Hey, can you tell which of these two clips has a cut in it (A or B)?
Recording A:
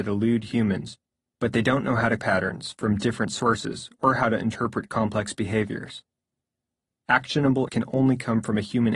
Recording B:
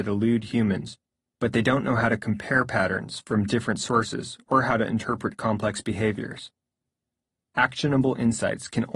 A